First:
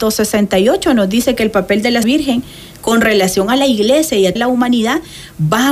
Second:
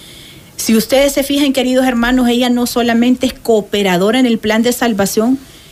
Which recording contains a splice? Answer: first; 2 cuts; at 2.0 s, 4.4 s

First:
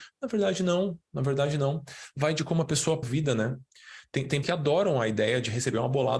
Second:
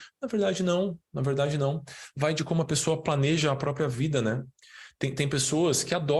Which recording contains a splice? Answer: first; 2 cuts; at 3.0 s, 4.4 s

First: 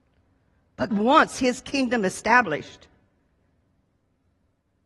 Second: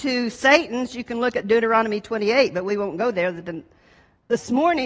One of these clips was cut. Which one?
first; 1 cut; at 0.9 s

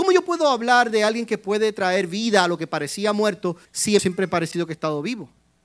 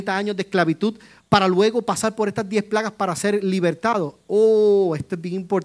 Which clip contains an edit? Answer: first; 2 cuts; at 3.6 s, 4.0 s

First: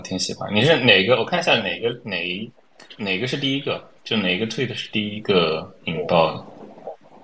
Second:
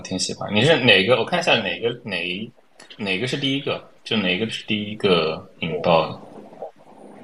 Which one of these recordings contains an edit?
second; 1 cut; at 4.5 s

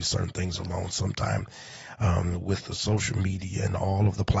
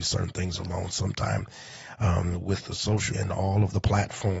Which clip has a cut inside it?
second; 1 cut; at 3.1 s

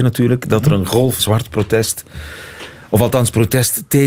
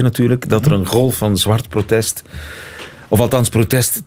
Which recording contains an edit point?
first; 1 cut; at 1.2 s

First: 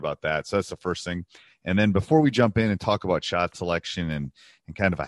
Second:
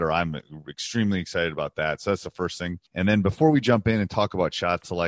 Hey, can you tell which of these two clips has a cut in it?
second; 1 cut; at 2.9 s

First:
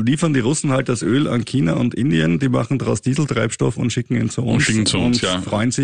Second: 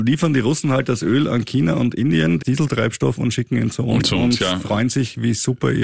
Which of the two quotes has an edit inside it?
second; 2 cuts; at 2.4 s, 4.0 s

